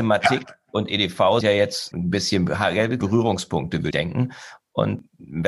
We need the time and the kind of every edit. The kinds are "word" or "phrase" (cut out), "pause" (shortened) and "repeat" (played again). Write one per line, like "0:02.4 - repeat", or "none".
0:01.4 - word
0:01.9 - word
0:03.0 - word
0:03.9 - word